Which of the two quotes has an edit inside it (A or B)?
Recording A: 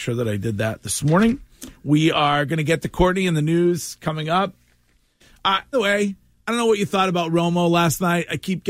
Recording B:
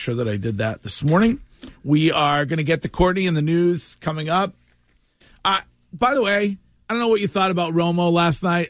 A